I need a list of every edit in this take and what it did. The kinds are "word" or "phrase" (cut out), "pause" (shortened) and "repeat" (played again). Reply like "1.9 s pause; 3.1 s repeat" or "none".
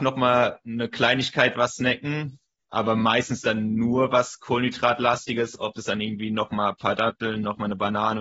none